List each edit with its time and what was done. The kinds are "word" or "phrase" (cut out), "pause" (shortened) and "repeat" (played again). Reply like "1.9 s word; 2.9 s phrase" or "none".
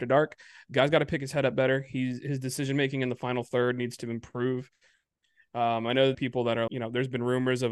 6.1 s phrase; 6.7 s word